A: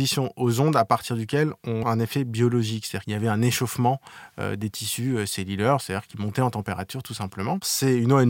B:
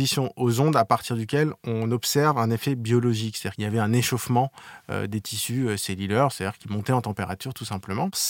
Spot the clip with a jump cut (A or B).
A